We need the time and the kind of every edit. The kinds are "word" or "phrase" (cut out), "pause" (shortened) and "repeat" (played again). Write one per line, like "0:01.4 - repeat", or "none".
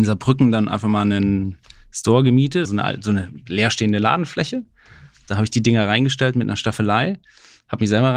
0:02.6 - word